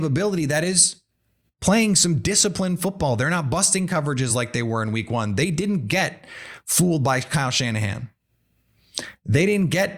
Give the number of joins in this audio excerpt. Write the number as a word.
zero